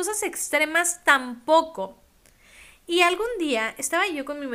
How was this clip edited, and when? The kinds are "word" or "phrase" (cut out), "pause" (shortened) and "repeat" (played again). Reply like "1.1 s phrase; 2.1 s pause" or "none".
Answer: none